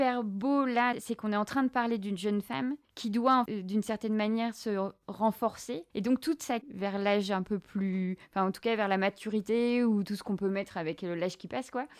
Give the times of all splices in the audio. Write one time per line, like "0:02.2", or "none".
0:02.8
0:03.5
0:05.9
0:06.6